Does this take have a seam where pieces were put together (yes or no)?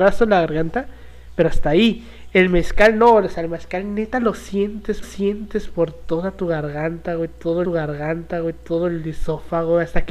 yes